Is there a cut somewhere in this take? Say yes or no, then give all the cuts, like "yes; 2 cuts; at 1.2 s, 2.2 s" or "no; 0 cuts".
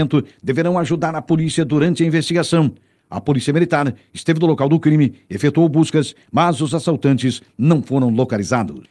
no; 0 cuts